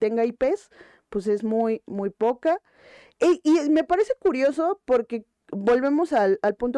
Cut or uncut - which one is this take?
uncut